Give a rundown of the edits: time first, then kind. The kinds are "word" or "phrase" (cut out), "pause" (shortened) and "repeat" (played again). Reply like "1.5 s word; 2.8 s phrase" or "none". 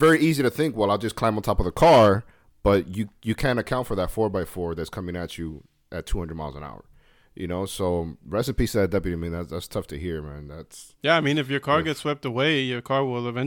none